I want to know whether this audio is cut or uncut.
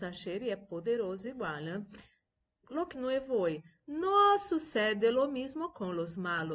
cut